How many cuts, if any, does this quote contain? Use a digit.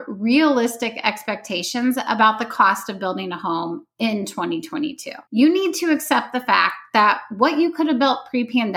1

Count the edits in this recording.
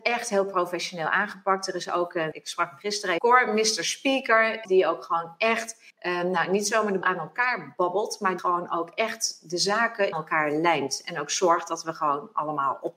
7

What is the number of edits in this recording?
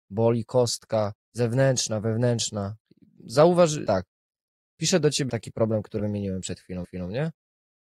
5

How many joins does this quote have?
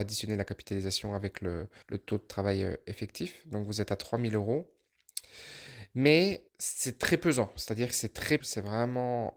3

